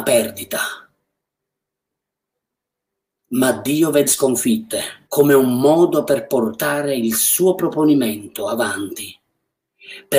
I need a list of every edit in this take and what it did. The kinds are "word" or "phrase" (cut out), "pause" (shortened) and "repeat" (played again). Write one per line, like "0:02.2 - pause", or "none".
0:04.1 - word
0:05.0 - pause